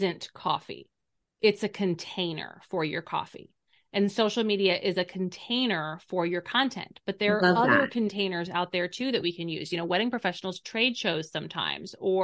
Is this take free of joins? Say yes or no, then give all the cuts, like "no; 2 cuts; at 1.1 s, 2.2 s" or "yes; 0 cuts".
yes; 0 cuts